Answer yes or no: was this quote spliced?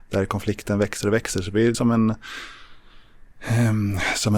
yes